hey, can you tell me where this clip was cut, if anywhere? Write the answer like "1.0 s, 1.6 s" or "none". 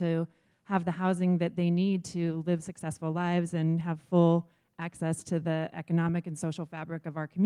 none